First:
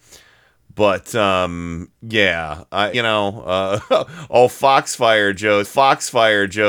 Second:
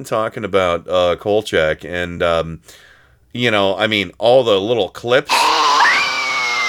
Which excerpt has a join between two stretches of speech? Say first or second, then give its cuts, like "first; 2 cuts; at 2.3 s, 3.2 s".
first; 2 cuts; at 2.9 s, 5.6 s